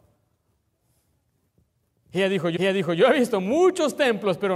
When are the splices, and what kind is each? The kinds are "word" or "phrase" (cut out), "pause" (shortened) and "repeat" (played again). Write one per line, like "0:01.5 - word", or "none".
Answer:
0:02.6 - repeat

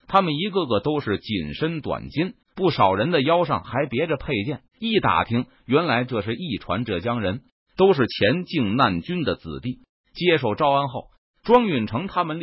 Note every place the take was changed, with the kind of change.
0:02.4 - pause
0:04.7 - pause

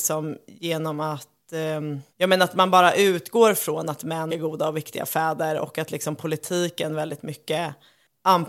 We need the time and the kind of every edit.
0:02.1 - pause
0:04.3 - phrase

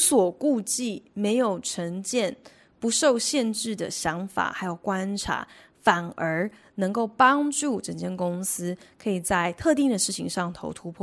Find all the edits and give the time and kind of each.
none

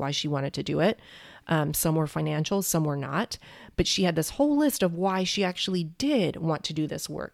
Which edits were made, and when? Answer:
none

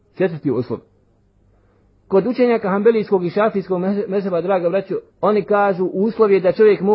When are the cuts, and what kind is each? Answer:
0:05.1 - pause

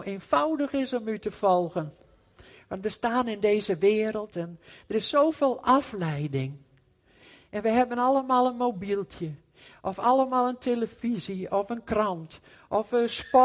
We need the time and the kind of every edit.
none

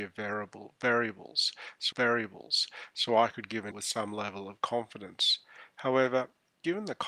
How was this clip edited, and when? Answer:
0:01.9 - repeat
0:03.7 - word

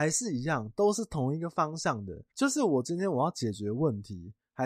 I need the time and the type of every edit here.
0:02.3 - pause

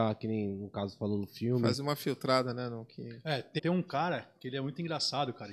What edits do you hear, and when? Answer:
0:03.6 - word

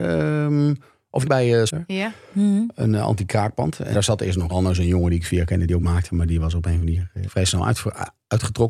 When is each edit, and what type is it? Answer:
0:01.2 - word
0:01.7 - word
0:03.9 - word
0:04.5 - word
0:05.3 - word
0:05.8 - word
0:07.3 - word

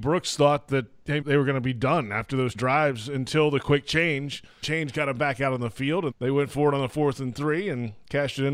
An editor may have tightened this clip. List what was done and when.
0:01.2 - word
0:02.5 - word
0:04.6 - word
0:06.1 - word

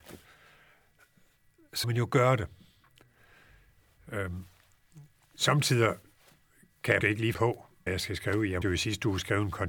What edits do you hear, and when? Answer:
0:01.8 - word
0:07.0 - word
0:07.3 - word
0:07.9 - word
0:08.6 - word

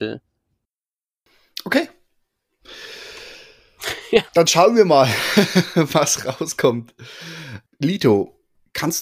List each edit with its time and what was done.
0:04.3 - pause
0:07.7 - pause

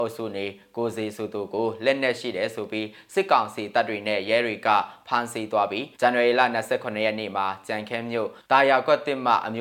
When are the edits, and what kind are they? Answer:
0:05.9 - pause
0:08.4 - pause

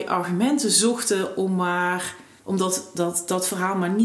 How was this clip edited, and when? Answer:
0:02.4 - pause

